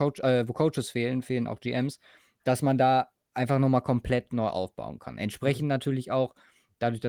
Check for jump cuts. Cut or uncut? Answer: uncut